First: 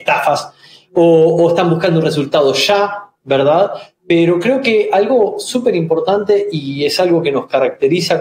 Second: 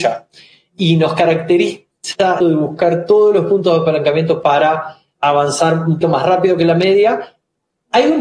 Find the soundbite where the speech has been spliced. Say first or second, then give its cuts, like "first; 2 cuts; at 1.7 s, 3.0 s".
second; 4 cuts; at 2.4 s, 4.4 s, 5.2 s, 6.0 s